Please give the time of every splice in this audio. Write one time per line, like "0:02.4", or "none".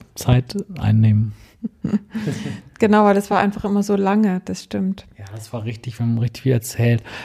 none